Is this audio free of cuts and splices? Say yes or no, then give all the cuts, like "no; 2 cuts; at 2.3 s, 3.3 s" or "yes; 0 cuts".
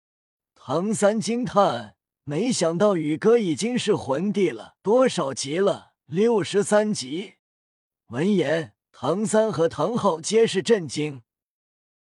no; 4 cuts; at 4.8 s, 6.0 s, 7.4 s, 8.9 s